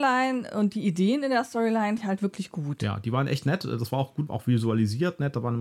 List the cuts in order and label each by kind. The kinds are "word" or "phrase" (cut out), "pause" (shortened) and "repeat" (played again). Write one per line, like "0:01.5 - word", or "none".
0:02.0 - word
0:04.3 - phrase